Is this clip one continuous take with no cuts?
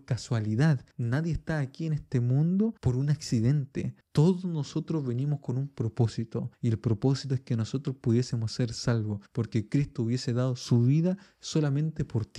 no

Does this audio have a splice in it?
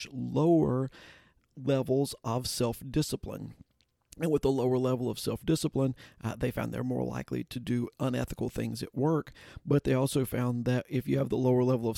no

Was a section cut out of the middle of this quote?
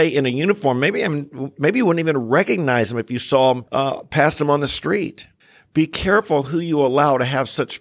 yes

